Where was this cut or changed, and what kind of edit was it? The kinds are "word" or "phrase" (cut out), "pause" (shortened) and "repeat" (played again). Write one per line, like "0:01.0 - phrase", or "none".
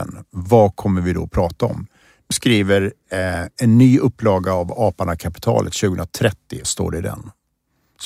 0:02.3 - word
0:06.6 - word